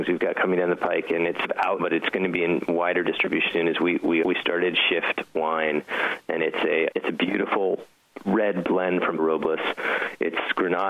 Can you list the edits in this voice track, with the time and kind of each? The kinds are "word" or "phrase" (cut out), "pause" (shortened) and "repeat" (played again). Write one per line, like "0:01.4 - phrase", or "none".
0:01.4 - word
0:01.8 - word
0:03.5 - word
0:04.2 - word
0:06.9 - word
0:09.2 - word